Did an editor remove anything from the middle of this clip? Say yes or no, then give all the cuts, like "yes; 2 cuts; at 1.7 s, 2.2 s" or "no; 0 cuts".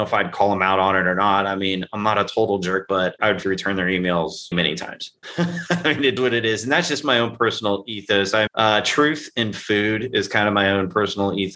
yes; 4 cuts; at 3.4 s, 4.5 s, 6.2 s, 8.5 s